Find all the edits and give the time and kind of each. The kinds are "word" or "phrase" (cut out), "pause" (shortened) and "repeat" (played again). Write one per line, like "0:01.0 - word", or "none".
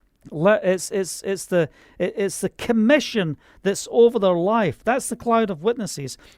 none